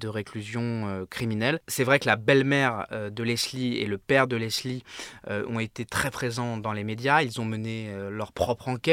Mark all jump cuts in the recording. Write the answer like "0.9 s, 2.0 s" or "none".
none